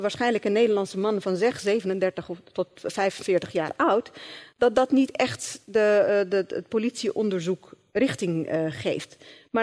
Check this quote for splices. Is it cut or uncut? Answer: uncut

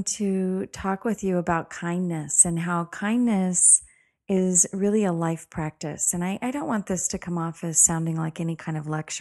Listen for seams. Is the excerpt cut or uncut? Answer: uncut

